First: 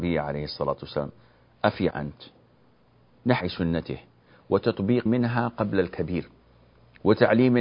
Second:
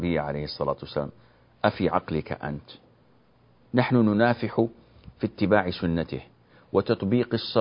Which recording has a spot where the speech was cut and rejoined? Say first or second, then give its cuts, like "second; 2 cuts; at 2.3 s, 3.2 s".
first; 3 cuts; at 1.9 s, 3.4 s, 5.1 s